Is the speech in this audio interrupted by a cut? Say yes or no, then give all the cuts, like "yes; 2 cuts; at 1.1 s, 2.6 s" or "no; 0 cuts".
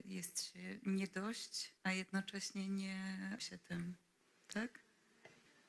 yes; 2 cuts; at 1.8 s, 3.4 s